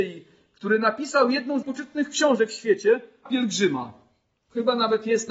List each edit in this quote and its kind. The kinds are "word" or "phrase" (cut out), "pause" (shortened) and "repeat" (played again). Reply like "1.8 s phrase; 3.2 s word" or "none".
1.6 s word; 3.3 s word